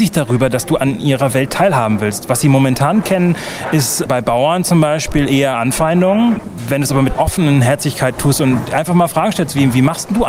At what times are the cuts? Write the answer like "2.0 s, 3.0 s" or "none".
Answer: 7.1 s